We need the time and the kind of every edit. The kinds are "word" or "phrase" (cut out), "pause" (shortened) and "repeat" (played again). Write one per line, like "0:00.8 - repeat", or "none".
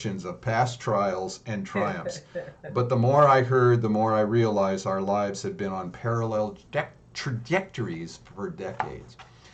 0:06.7 - word

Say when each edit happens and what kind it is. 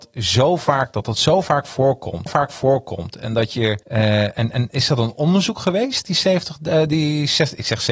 0:02.3 - repeat
0:03.8 - pause

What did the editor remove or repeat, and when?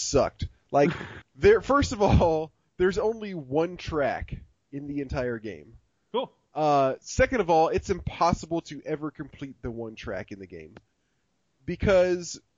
0:01.2 - word

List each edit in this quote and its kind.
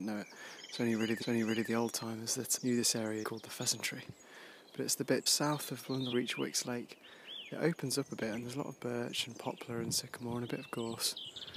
0:01.2 - repeat
0:02.6 - word
0:03.2 - phrase
0:05.3 - word
0:06.1 - phrase

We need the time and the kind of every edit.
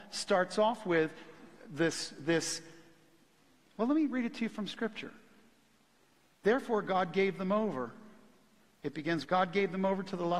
0:09.2 - word

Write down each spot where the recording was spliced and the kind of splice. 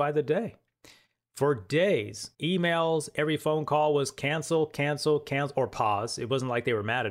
0:02.3 - pause

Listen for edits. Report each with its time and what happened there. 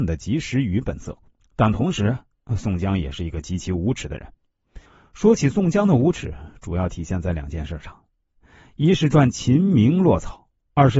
0:01.4 - pause
0:04.9 - pause

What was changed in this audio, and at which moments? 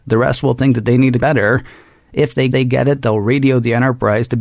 0:01.2 - phrase
0:02.5 - repeat

